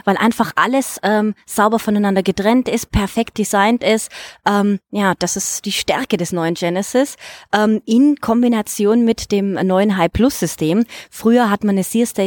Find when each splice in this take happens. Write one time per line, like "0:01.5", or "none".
none